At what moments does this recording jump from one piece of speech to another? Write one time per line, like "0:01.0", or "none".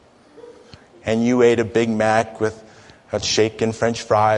0:03.2